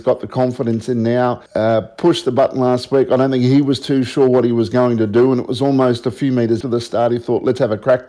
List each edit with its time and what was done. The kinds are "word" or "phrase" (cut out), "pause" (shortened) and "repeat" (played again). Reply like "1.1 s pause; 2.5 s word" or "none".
1.5 s pause; 6.6 s word